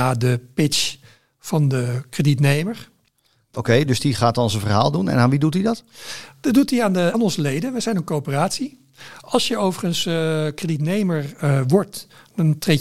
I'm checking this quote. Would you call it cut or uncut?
cut